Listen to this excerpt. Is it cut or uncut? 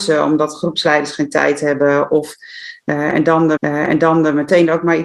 cut